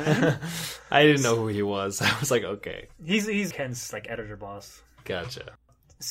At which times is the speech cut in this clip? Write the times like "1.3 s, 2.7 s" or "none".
3.5 s